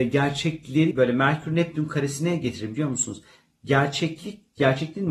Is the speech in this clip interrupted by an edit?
yes; 1 cut; at 0.9 s

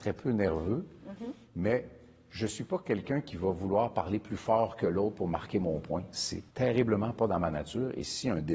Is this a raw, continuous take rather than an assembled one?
no; 1 cut; at 6.5 s

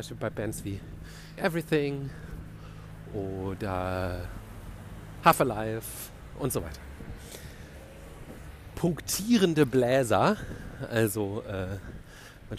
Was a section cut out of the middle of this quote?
yes; 2 cuts; at 1.4 s, 5.2 s

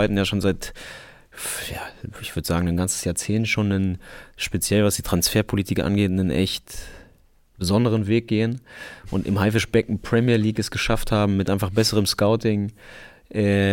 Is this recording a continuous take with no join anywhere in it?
yes; 0 cuts

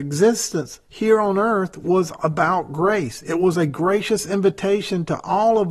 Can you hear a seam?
no; 0 cuts

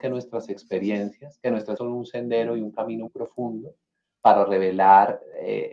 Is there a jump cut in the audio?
yes; 2 cuts; at 1.8 s, 3.1 s

